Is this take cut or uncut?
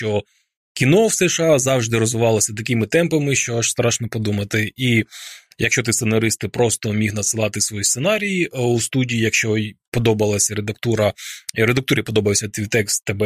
uncut